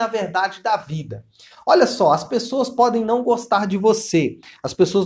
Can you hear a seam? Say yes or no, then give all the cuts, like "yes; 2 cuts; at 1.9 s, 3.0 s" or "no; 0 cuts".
no; 0 cuts